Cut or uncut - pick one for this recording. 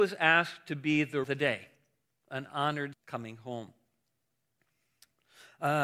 cut